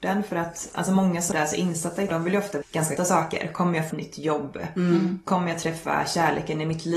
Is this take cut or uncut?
cut